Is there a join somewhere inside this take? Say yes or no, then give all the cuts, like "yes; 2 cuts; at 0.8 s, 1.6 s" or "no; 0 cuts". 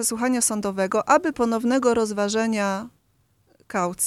yes; 1 cut; at 1.3 s